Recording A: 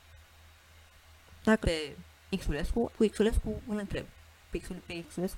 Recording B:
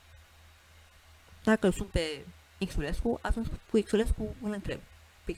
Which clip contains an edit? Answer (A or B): A